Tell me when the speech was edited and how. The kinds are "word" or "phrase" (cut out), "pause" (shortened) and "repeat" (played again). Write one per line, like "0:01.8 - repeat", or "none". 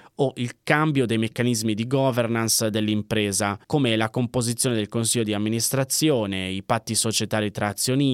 0:03.6 - pause